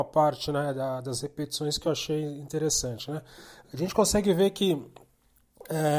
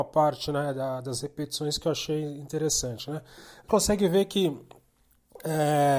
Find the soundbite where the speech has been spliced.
second; 1 cut; at 3.7 s

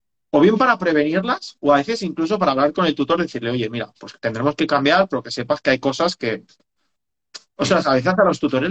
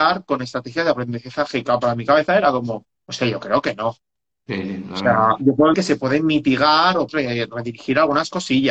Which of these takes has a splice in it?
second; 4 cuts; at 2.9 s, 4.2 s, 5.7 s, 7.1 s

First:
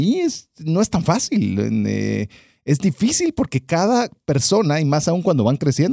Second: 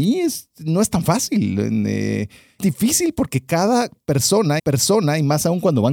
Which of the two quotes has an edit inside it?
second; 2 cuts; at 2.6 s, 4.6 s

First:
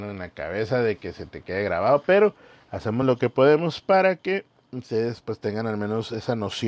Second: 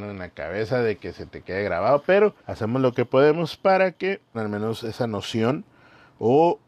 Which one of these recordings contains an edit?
second; 2 cuts; at 2.4 s, 4.3 s

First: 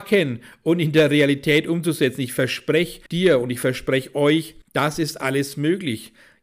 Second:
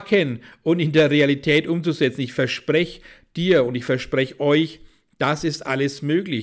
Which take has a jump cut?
first; 2 cuts; at 3.1 s, 4.6 s

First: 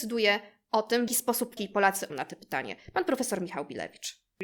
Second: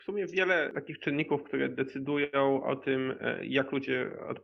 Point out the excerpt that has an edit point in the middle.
first; 3 cuts; at 1.1 s, 1.6 s, 2.1 s

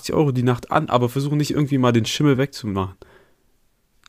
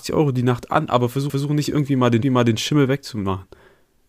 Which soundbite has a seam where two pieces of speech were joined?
second; 2 cuts; at 1.3 s, 2.2 s

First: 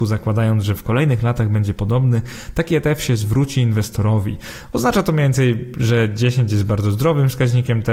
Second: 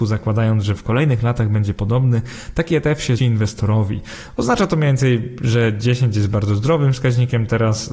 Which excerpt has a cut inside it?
second; 1 cut; at 3.2 s

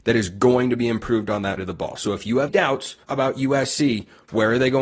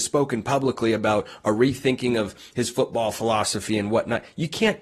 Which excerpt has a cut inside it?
first; 3 cuts; at 1.6 s, 2.5 s, 3.0 s

